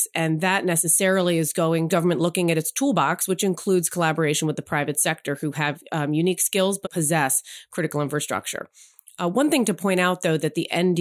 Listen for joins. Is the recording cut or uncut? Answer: cut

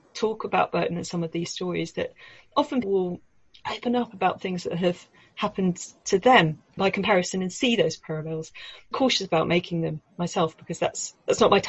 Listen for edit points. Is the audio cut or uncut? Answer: cut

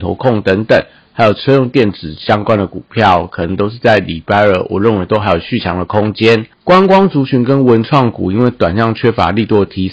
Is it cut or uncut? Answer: cut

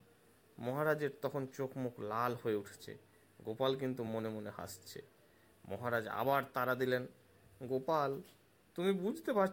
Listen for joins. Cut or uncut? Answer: uncut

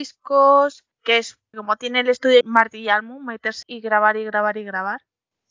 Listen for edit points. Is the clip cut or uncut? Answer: cut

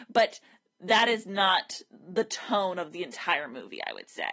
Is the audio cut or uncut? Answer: uncut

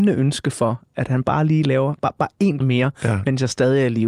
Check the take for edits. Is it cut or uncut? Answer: cut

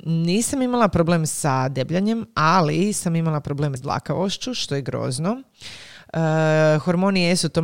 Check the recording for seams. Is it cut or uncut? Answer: cut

